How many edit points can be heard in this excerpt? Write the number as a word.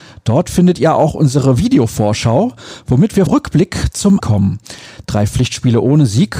two